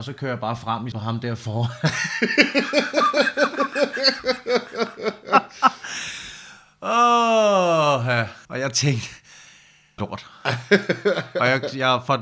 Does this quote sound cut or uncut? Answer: cut